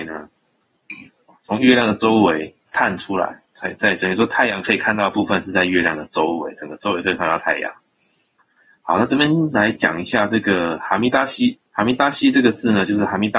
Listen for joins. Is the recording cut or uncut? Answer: cut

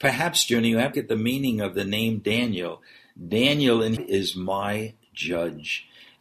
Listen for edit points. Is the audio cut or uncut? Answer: cut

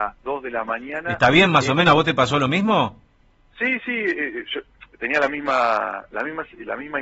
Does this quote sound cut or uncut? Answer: uncut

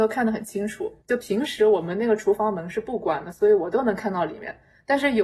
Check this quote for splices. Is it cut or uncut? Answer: cut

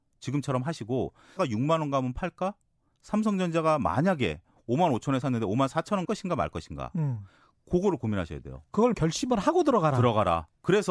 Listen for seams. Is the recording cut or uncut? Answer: cut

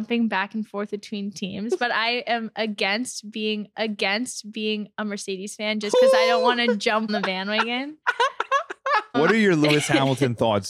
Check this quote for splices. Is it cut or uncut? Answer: cut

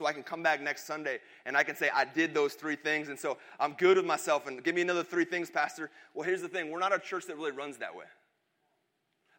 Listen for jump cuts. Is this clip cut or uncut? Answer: uncut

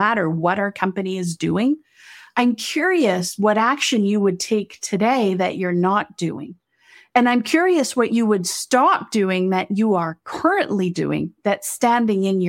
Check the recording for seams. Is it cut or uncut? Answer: uncut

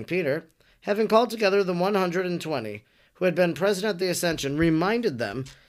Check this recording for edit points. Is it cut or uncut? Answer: uncut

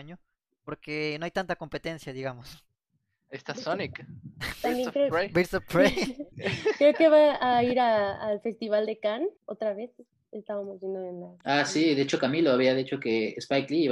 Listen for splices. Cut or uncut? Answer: cut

